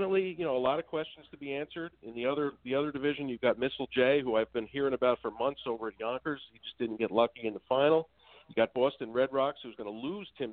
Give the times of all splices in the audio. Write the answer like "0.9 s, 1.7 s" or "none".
none